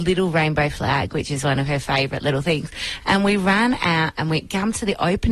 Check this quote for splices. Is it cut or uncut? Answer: uncut